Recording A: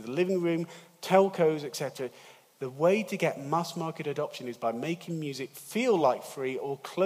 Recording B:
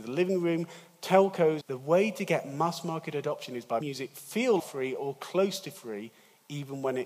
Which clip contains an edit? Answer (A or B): B